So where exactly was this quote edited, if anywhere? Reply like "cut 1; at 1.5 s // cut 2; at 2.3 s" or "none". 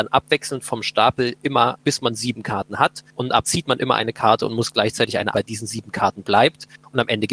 cut 1; at 1.8 s // cut 2; at 3.1 s // cut 3; at 3.4 s // cut 4; at 5.3 s